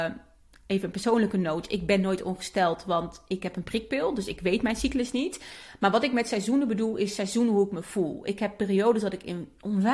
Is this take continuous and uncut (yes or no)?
yes